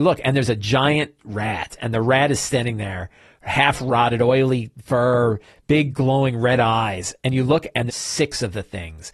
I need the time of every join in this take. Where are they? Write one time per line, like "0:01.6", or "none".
0:07.9